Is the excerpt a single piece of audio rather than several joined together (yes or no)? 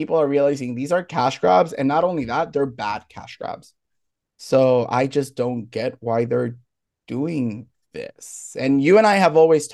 yes